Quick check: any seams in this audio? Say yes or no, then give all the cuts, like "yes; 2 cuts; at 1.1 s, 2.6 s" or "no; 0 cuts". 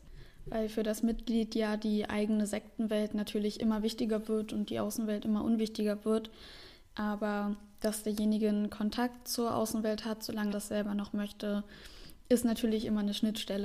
yes; 1 cut; at 10.5 s